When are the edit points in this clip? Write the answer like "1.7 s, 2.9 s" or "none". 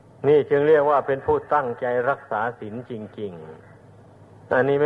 3.6 s